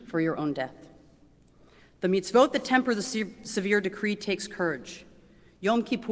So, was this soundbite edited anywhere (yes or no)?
no